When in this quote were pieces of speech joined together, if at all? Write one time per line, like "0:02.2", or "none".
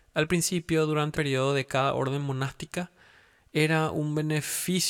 0:01.1